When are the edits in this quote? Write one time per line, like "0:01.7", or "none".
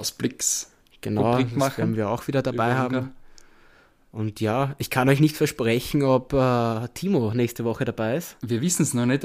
none